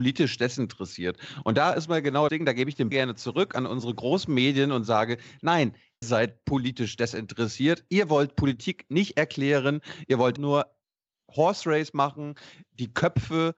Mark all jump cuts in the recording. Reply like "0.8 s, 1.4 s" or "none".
2.3 s, 2.9 s, 6.0 s, 10.4 s